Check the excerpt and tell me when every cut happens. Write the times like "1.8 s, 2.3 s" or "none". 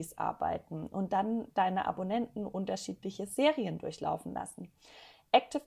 none